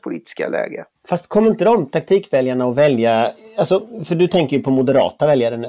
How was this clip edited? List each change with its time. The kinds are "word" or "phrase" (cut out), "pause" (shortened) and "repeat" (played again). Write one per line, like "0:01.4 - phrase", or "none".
0:01.0 - pause